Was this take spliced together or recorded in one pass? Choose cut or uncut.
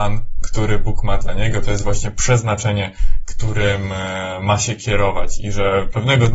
uncut